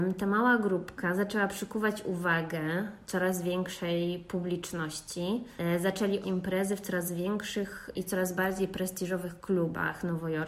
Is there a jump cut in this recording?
yes; 1 cut; at 6.2 s

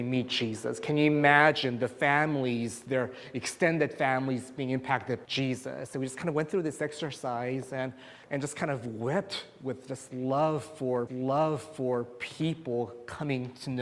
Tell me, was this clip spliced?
yes; 3 cuts; at 5.2 s, 8.2 s, 11.1 s

